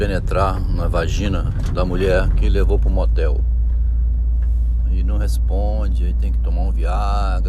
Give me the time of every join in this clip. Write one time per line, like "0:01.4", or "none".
none